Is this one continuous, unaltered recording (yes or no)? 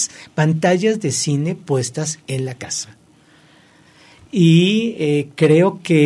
yes